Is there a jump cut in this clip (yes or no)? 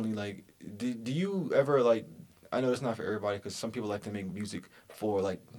no